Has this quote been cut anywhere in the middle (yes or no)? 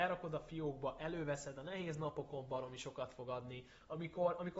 no